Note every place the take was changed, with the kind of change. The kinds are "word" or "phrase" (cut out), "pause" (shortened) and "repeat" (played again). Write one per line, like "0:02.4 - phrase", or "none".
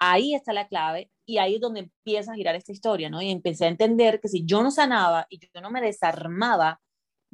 none